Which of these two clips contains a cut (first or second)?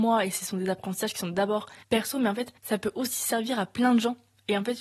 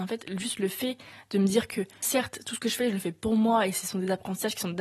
first